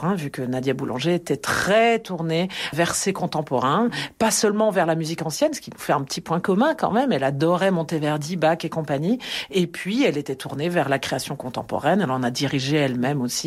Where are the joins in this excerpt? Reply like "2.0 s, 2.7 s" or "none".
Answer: none